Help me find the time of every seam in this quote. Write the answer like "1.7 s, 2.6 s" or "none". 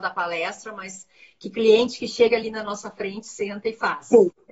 none